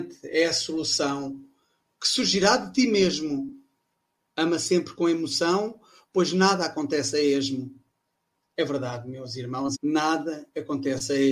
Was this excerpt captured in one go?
no; 1 cut; at 9.7 s

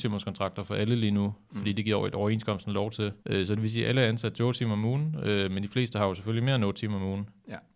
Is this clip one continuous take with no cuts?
no; 1 cut; at 3.2 s

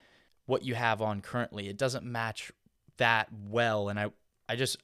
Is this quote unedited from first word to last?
yes; 0 cuts

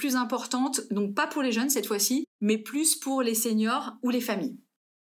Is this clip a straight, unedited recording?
no; 1 cut; at 2.3 s

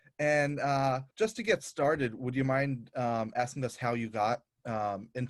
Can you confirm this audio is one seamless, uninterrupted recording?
no; 1 cut; at 1.1 s

